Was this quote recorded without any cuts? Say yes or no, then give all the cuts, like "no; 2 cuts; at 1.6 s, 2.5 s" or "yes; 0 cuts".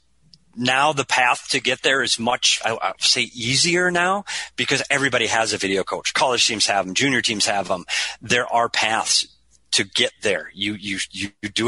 yes; 0 cuts